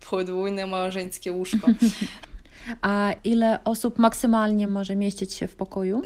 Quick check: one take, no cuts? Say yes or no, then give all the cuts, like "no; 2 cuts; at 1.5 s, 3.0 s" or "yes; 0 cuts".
yes; 0 cuts